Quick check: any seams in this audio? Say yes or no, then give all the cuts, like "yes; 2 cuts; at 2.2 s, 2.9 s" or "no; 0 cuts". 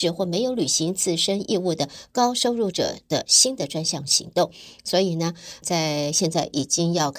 yes; 1 cut; at 5.6 s